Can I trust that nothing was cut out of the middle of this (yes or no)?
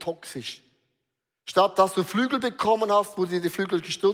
yes